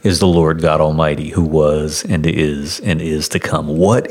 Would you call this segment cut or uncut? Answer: uncut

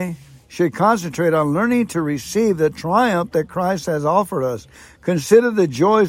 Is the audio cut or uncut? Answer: uncut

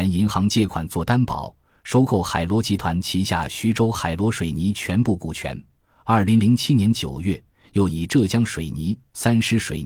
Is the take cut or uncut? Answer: uncut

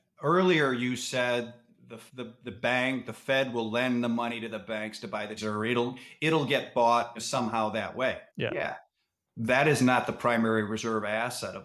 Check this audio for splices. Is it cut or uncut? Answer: cut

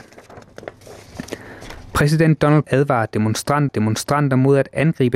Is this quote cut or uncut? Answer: cut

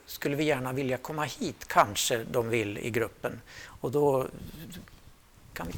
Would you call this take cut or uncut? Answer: uncut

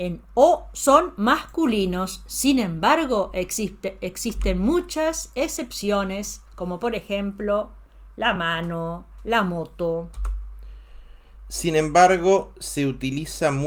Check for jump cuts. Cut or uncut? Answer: uncut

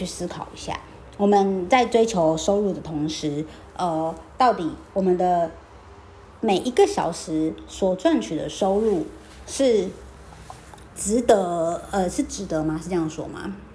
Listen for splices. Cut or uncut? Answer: uncut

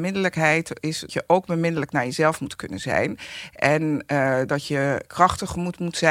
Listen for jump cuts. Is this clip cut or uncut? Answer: cut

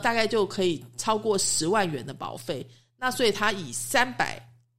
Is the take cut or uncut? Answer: uncut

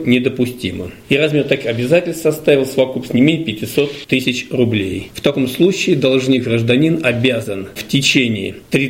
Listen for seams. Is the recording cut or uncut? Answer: uncut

